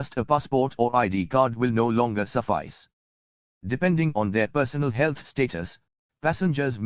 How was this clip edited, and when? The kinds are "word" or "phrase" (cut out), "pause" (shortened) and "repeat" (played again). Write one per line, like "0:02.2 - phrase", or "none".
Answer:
none

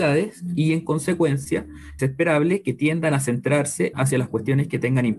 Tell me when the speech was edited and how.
0:02.0 - word
0:03.9 - phrase

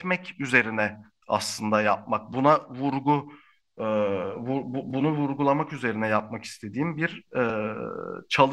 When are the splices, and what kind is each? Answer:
none

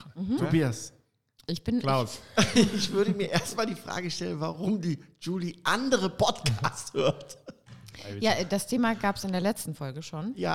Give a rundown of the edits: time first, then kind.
none

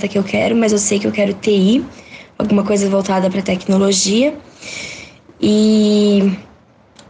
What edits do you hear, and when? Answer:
none

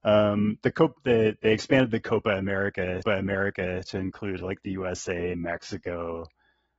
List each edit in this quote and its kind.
0:03.0 - repeat

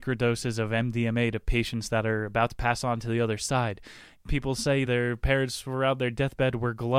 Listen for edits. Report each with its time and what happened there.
none

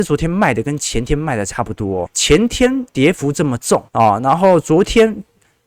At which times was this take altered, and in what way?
0:02.1 - word
0:03.9 - pause

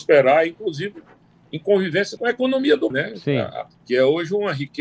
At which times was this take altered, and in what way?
0:02.2 - word
0:02.9 - word
0:03.7 - word

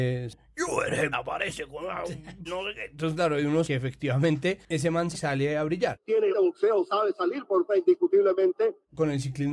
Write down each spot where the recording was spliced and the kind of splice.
0:01.1 - word
0:02.5 - word
0:03.6 - word
0:05.1 - word
0:06.3 - word
0:06.9 - word
0:07.7 - word

